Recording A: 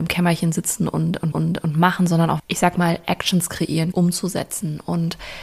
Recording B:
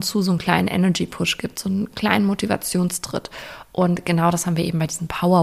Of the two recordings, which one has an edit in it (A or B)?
A